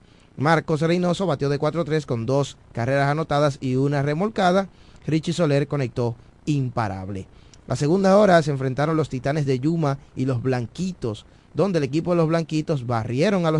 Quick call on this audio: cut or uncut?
uncut